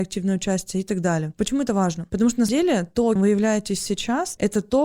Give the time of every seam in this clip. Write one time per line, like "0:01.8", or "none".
0:02.5
0:03.2